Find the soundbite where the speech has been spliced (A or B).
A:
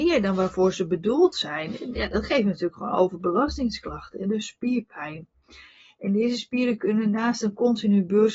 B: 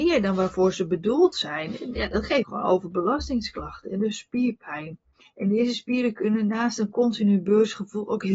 B